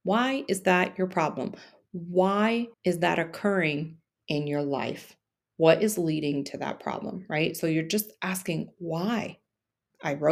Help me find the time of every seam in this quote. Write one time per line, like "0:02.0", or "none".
0:02.7